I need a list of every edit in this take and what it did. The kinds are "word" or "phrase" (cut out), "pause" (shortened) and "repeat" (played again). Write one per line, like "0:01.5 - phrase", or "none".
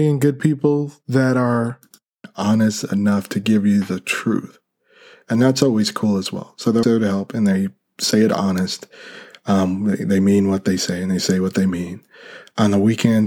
0:06.8 - word